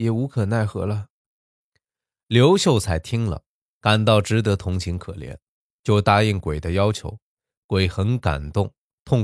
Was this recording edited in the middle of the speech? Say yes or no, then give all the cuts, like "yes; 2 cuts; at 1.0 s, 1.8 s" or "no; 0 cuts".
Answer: no; 0 cuts